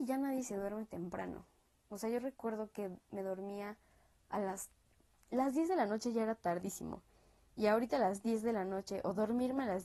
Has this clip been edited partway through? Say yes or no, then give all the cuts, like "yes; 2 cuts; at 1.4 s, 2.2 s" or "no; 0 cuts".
no; 0 cuts